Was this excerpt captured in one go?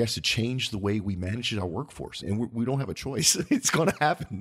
no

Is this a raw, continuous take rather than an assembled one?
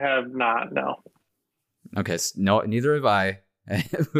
yes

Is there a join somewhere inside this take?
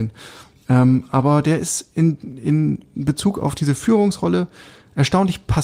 no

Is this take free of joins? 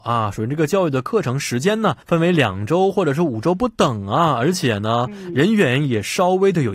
no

